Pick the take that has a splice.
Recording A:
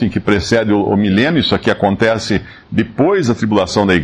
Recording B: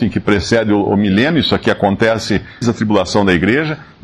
B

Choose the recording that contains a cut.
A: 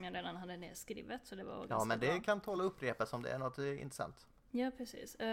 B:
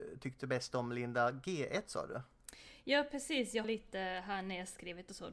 B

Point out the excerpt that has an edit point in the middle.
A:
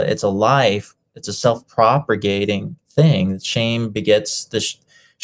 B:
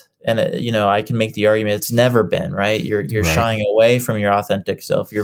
A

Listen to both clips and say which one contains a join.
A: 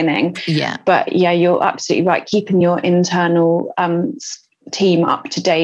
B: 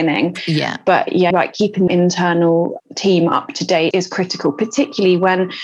B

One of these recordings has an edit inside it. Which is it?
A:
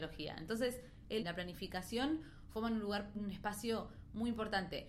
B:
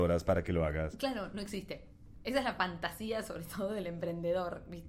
A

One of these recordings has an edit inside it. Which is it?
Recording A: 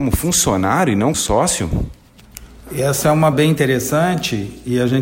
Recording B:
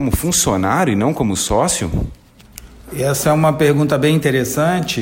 A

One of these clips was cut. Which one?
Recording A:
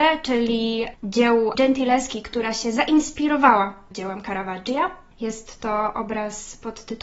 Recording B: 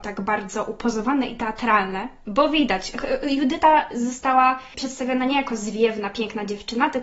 A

